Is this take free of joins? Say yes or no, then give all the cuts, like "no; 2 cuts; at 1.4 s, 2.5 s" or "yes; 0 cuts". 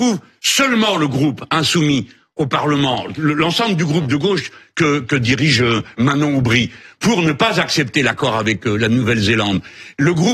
yes; 0 cuts